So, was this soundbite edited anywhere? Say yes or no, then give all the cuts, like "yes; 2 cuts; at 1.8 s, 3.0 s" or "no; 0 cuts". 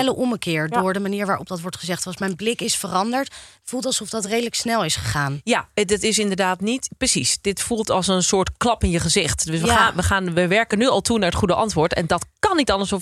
no; 0 cuts